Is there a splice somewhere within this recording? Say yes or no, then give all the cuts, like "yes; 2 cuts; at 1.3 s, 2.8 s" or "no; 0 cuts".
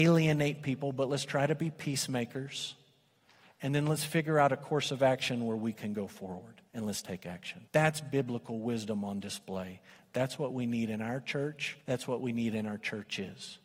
yes; 3 cuts; at 6.7 s, 7.7 s, 11.8 s